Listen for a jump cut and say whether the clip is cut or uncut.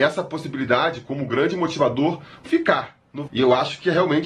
cut